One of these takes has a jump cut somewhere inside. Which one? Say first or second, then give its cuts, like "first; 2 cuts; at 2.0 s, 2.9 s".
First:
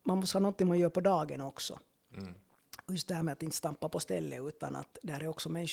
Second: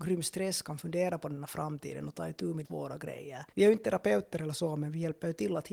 second; 2 cuts; at 2.6 s, 3.5 s